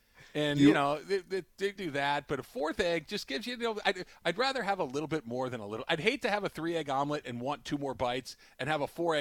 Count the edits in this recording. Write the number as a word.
one